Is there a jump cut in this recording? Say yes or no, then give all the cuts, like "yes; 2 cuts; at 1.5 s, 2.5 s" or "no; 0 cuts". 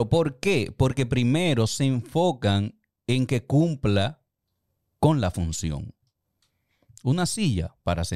no; 0 cuts